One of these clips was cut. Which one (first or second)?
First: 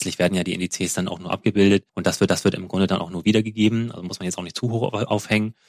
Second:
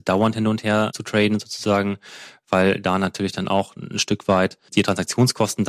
first